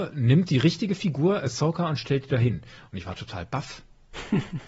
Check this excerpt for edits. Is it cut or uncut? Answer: uncut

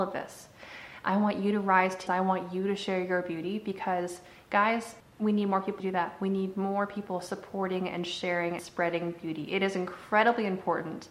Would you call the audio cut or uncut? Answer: cut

